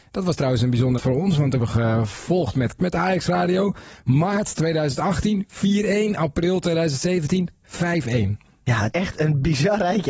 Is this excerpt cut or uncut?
cut